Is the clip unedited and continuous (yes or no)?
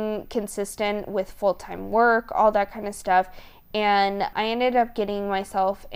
yes